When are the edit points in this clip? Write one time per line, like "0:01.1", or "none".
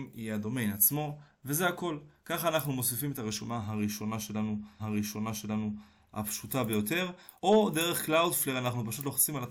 0:04.8
0:07.4